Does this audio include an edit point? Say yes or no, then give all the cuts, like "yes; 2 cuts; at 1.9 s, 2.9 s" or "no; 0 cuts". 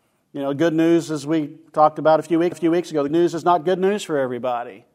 yes; 2 cuts; at 2.5 s, 3.1 s